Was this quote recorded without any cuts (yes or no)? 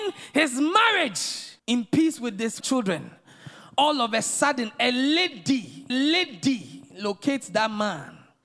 no